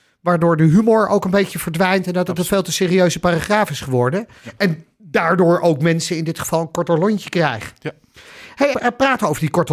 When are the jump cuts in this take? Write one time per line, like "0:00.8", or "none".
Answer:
0:08.7

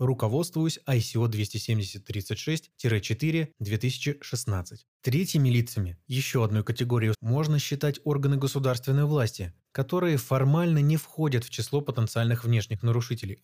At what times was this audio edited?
0:04.9
0:07.1

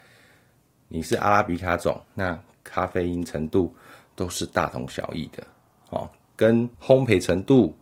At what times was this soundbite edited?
0:02.0
0:06.7

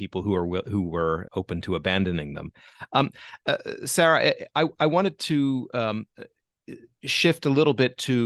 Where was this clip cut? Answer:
0:01.3

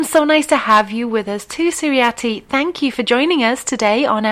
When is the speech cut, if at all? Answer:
none

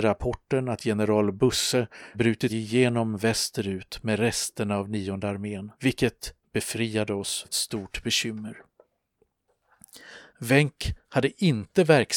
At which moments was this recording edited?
0:02.1
0:02.5
0:05.8
0:07.4
0:10.3

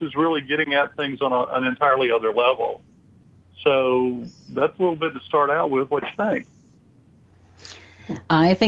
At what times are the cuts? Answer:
none

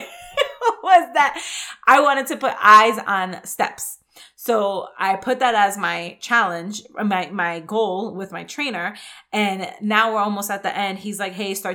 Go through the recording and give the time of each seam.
none

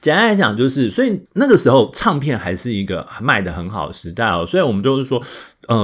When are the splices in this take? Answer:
0:01.3

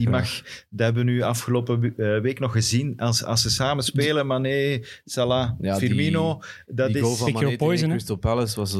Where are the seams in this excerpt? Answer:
none

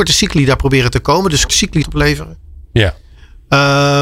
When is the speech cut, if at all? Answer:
0:01.5
0:01.8

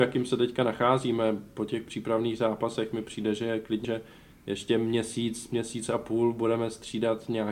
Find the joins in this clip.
0:03.8

